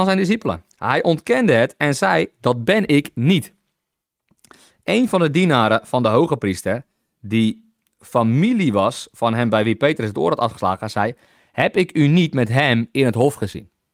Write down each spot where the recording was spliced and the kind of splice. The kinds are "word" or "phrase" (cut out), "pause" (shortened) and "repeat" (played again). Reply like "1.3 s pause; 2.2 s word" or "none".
none